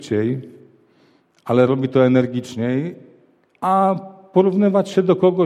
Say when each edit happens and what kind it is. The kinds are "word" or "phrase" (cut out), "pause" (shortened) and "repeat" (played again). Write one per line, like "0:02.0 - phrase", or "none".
none